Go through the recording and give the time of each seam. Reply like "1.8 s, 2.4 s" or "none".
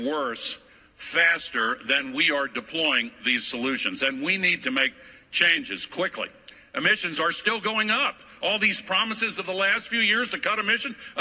none